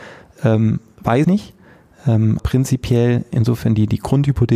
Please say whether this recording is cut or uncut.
cut